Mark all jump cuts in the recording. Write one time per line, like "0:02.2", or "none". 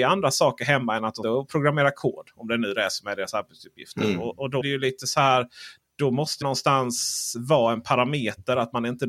0:01.2
0:04.6
0:06.4